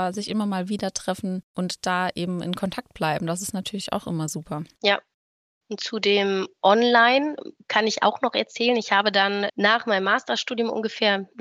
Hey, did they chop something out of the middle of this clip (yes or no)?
yes